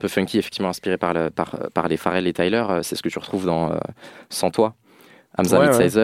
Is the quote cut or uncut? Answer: uncut